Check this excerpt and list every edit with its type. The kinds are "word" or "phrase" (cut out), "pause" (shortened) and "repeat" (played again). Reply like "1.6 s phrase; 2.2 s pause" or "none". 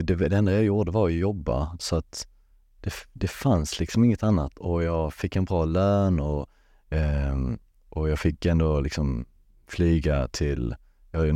none